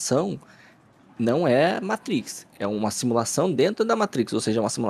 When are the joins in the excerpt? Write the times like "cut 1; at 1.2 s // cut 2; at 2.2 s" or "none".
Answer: none